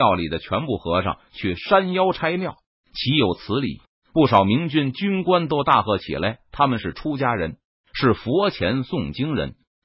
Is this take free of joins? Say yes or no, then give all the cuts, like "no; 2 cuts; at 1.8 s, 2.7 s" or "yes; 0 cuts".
yes; 0 cuts